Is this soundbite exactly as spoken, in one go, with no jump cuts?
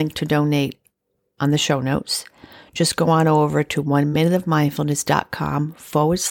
yes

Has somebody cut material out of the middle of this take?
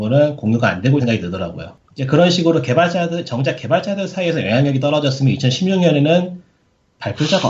yes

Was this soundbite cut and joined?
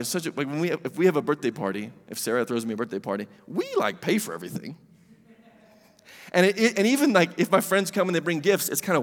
no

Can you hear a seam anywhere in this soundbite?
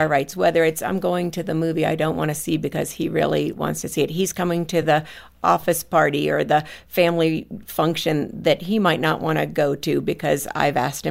no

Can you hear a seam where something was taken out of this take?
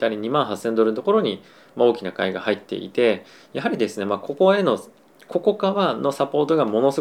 no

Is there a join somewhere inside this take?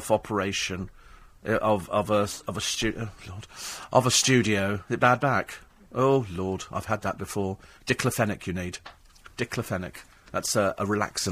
no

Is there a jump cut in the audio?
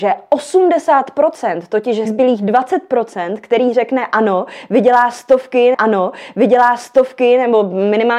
yes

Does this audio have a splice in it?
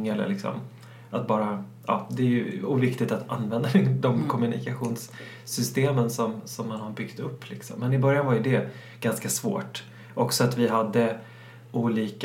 no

